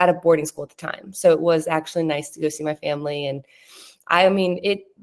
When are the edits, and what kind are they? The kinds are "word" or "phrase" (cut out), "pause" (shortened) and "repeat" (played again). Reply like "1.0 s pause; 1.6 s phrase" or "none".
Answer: none